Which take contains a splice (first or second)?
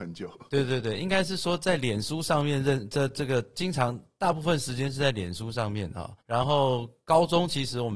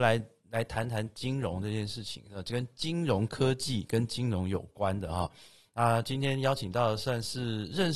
first